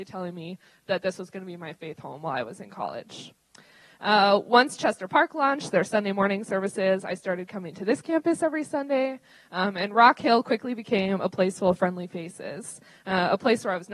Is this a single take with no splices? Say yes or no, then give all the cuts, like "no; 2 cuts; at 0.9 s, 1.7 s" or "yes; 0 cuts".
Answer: yes; 0 cuts